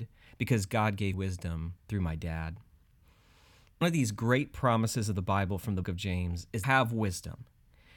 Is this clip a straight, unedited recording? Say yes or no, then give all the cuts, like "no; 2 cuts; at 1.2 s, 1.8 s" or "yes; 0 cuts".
no; 5 cuts; at 1.1 s, 1.8 s, 3.8 s, 5.8 s, 6.6 s